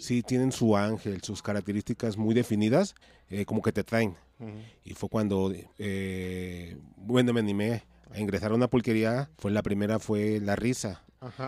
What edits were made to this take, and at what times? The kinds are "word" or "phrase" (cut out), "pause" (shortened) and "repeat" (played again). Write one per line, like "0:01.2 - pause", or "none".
0:03.0 - pause
0:05.7 - pause
0:09.3 - pause